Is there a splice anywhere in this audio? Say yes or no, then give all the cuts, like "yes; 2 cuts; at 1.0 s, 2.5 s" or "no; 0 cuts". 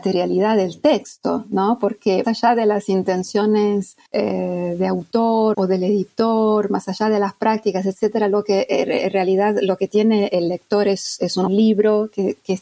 yes; 5 cuts; at 2.2 s, 4.1 s, 5.5 s, 10.3 s, 11.5 s